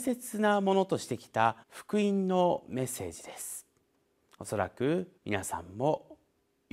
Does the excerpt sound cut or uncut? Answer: cut